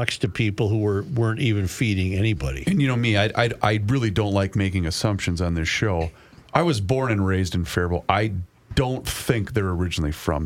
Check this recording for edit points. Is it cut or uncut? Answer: uncut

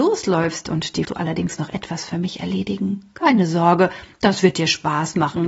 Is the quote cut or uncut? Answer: cut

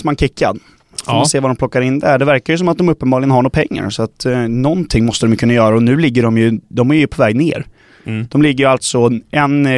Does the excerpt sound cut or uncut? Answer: uncut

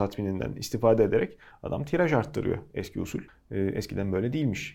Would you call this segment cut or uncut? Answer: cut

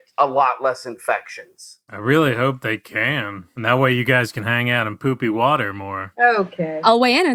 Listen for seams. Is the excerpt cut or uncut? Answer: uncut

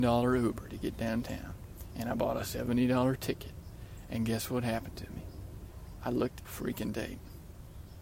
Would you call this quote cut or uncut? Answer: cut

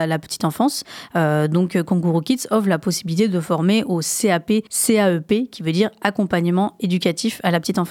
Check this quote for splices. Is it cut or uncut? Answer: cut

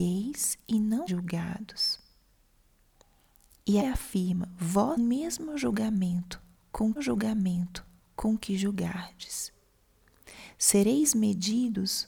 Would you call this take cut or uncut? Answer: cut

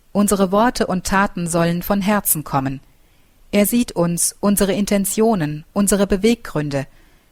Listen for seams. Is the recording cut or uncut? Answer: uncut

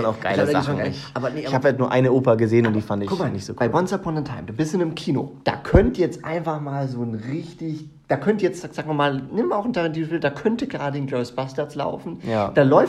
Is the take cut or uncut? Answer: cut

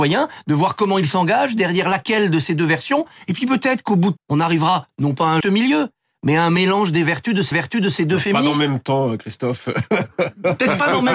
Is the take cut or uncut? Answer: cut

